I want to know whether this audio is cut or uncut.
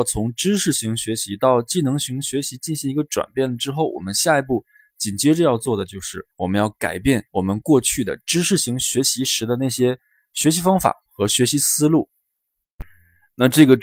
cut